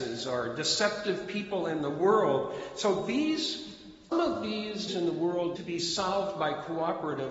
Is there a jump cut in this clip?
yes; 3 cuts; at 4.1 s, 4.9 s, 5.6 s

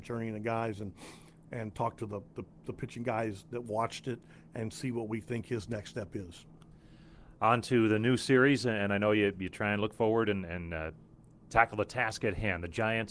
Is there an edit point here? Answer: no; 0 cuts

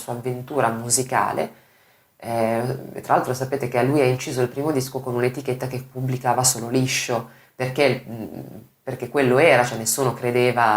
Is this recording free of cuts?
yes; 0 cuts

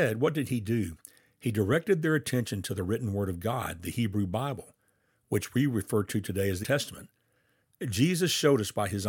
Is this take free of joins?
no; 1 cut; at 6.6 s

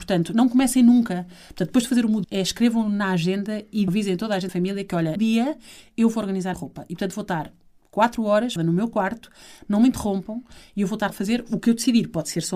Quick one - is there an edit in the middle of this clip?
yes; 7 cuts; at 2.2 s, 3.9 s, 4.5 s, 5.2 s, 6.5 s, 8.6 s, 11.1 s

